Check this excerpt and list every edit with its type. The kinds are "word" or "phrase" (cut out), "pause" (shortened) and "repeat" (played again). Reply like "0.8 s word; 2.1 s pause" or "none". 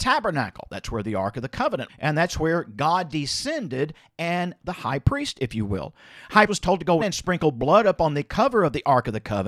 1.9 s word; 4.6 s word; 6.5 s word; 7.0 s word